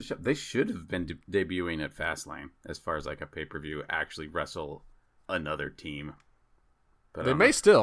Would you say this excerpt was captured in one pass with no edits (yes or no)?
no